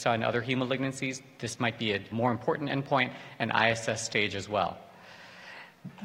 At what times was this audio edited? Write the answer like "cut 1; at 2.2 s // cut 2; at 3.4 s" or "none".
cut 1; at 2.1 s